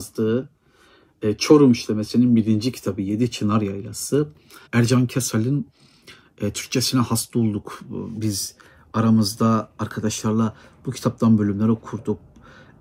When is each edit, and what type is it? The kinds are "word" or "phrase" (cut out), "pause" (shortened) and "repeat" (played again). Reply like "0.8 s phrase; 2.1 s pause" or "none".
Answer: 4.7 s pause